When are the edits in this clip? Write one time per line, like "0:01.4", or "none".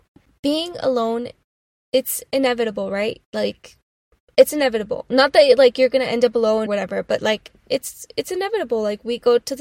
0:06.7